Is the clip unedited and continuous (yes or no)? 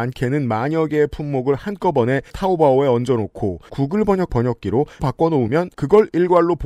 no